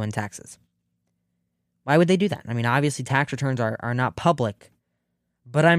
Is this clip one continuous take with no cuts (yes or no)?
yes